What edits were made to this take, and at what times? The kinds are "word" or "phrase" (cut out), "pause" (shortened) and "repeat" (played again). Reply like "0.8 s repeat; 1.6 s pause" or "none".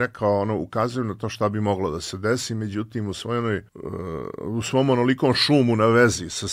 3.7 s pause